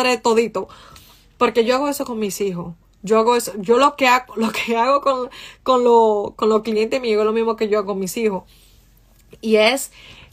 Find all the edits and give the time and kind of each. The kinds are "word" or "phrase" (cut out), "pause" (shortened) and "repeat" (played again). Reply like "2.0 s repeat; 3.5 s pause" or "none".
none